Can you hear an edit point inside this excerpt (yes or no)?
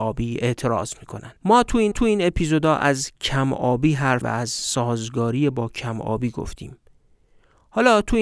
yes